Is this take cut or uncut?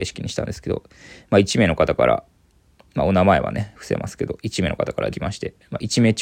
cut